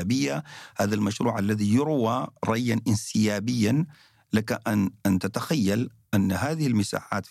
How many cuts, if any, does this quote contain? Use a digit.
0